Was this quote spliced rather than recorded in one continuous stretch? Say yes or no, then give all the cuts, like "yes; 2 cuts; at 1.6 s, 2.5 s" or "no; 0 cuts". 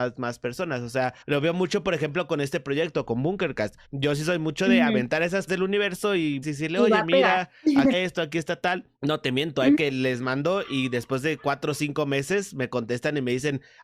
yes; 7 cuts; at 1.2 s, 3.8 s, 5.5 s, 6.4 s, 7.9 s, 9.0 s, 9.7 s